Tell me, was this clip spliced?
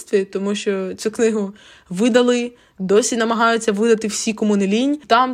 no; 0 cuts

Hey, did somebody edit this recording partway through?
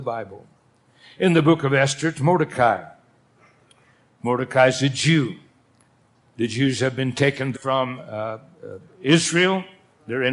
yes; 1 cut; at 7.5 s

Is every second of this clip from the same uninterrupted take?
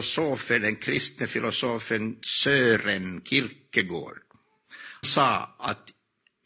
no; 1 cut; at 5.0 s

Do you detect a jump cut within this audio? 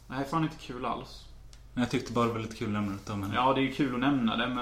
no; 0 cuts

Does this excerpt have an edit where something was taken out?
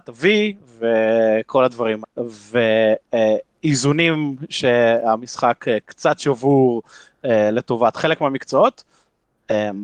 yes; 1 cut; at 2.0 s

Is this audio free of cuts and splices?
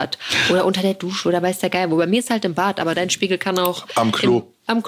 yes; 0 cuts

